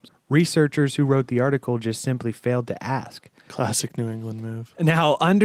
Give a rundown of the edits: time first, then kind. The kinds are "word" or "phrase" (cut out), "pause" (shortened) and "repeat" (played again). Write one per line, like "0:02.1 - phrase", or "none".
none